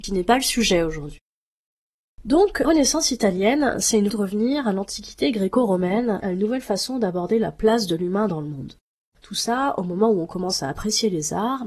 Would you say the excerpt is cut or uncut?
cut